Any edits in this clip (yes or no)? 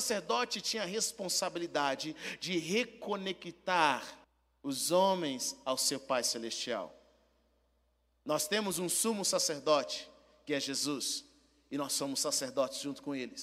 yes